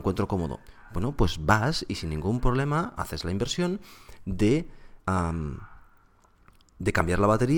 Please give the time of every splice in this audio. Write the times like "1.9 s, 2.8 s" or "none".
5.0 s